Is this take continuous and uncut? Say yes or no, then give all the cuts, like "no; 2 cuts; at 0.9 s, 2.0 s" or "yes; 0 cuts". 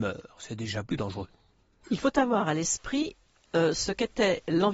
yes; 0 cuts